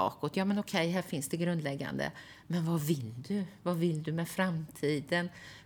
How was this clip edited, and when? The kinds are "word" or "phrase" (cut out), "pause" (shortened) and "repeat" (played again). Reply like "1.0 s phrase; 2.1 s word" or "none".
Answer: none